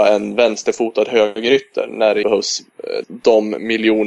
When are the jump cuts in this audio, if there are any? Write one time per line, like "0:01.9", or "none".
0:02.2
0:03.0